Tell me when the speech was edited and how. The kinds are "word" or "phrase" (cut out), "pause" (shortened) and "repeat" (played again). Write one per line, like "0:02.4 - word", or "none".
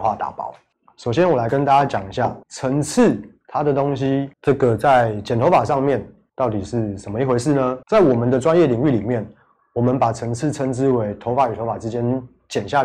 0:02.4 - pause
0:04.3 - pause
0:07.8 - pause